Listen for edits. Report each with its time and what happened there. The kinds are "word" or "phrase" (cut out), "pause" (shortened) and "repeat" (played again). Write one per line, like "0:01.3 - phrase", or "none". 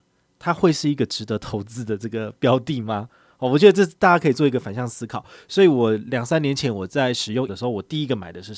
0:07.5 - word